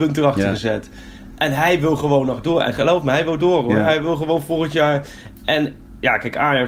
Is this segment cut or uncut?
uncut